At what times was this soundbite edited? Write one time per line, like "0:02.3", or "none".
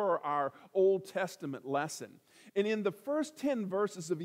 none